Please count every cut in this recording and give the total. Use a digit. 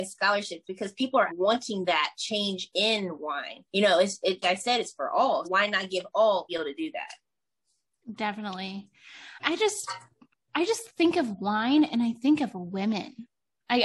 7